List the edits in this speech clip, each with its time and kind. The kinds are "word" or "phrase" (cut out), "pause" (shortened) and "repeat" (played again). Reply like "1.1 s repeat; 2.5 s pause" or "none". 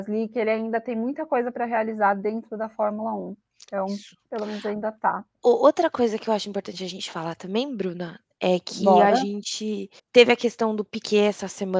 10.0 s pause